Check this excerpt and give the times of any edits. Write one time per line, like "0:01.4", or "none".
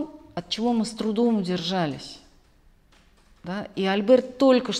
none